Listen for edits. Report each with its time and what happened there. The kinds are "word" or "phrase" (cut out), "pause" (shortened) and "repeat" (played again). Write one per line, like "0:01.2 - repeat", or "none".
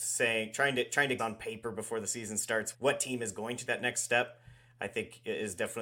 0:01.2 - word
0:02.7 - word
0:03.7 - word